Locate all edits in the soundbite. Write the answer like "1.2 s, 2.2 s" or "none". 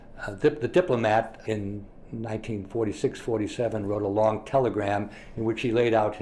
1.4 s